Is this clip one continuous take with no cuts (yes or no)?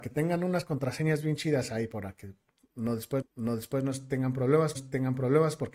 no